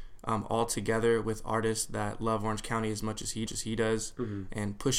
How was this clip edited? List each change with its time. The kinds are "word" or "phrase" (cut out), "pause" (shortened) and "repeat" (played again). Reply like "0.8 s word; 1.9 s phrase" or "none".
3.5 s repeat

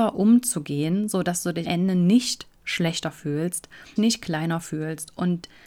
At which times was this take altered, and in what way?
1.6 s word; 4.0 s phrase

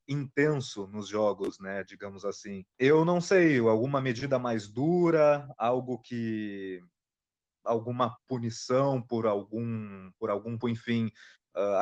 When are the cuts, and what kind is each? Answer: 2.7 s pause; 10.6 s word

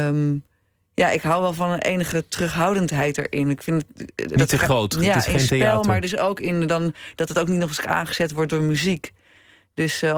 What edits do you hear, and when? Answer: none

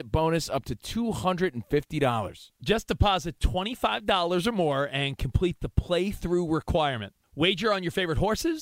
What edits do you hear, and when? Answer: none

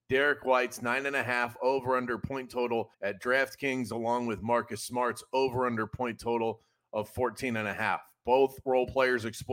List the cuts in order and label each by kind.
2.9 s pause

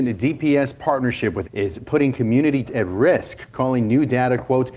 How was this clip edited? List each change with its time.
1.4 s word; 2.6 s word

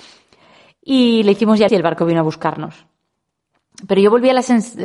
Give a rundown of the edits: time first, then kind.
1.7 s word

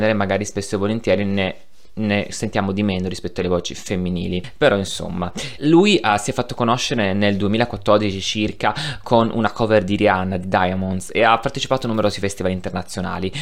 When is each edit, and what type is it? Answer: 5.6 s word

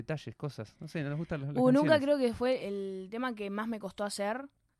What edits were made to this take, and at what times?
2.6 s word

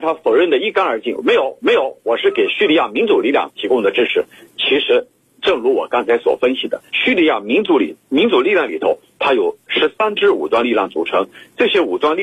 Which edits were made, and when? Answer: 1.6 s repeat; 6.9 s pause

